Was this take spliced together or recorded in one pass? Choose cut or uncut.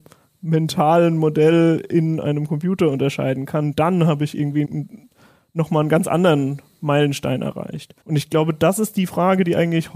cut